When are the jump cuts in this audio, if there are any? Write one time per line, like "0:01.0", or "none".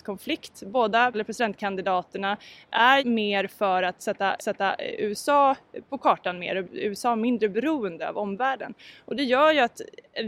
0:01.1
0:03.0
0:04.4
0:06.6